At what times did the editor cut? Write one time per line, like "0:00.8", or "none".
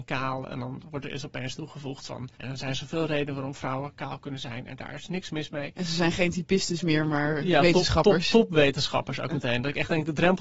0:02.3